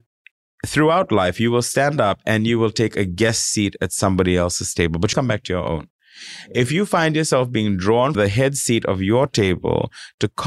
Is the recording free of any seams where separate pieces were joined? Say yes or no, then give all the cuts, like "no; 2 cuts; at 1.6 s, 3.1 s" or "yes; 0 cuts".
no; 2 cuts; at 5.1 s, 8.1 s